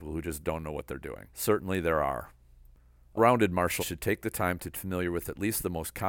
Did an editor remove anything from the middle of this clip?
yes; 4 cuts; at 1.3 s, 3.2 s, 3.8 s, 4.7 s

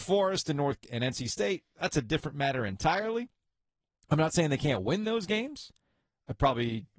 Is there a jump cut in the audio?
no; 0 cuts

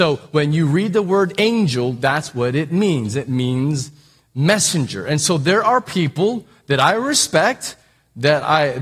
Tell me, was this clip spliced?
no; 0 cuts

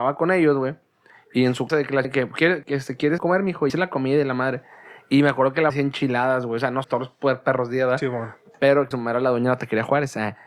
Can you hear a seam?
yes; 8 cuts; at 1.7 s, 2.0 s, 2.6 s, 3.2 s, 3.7 s, 5.7 s, 6.8 s, 8.9 s

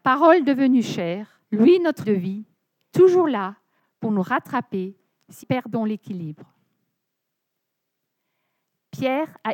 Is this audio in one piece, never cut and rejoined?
no; 4 cuts; at 1.4 s, 2.0 s, 2.9 s, 5.4 s

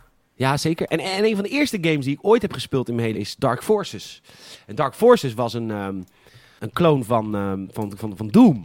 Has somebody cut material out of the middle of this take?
yes; 2 cuts; at 3.1 s, 6.6 s

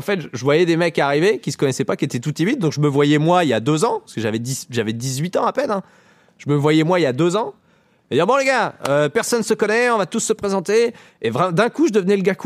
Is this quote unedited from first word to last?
yes; 0 cuts

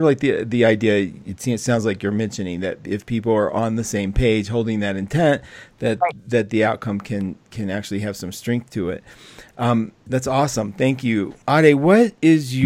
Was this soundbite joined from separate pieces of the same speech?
yes; 1 cut; at 11.4 s

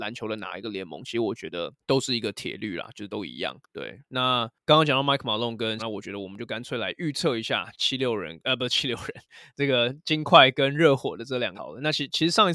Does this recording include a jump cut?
yes; 2 cuts; at 5.8 s, 11.5 s

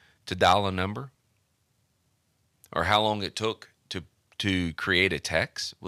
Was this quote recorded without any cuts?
yes; 0 cuts

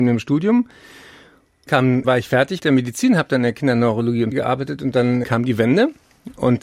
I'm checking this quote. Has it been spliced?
yes; 5 cuts; at 1.7 s, 2.0 s, 2.6 s, 4.3 s, 5.2 s

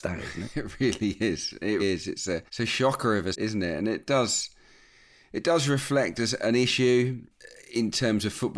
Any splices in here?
yes; 3 cuts; at 1.8 s, 2.5 s, 3.3 s

